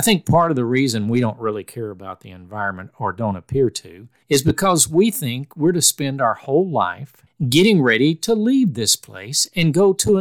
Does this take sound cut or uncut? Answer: uncut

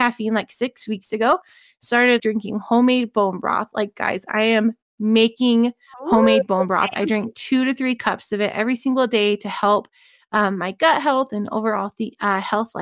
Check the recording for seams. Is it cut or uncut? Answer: cut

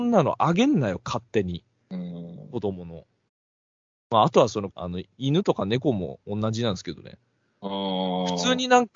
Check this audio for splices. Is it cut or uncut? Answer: cut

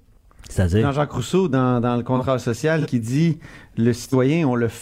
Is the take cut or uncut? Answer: uncut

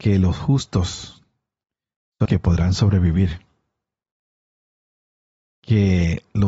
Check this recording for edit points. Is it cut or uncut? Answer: cut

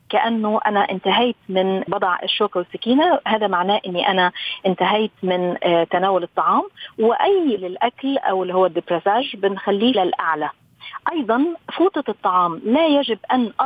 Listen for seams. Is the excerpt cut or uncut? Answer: cut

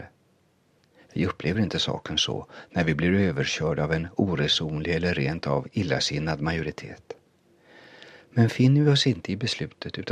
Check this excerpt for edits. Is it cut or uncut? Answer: uncut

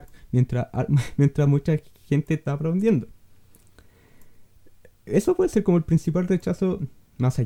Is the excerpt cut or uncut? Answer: cut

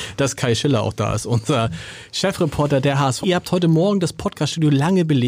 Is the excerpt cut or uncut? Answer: cut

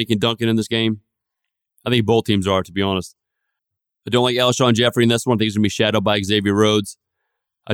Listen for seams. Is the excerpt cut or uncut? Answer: uncut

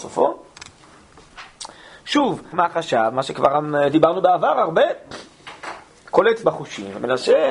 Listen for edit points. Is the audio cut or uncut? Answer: cut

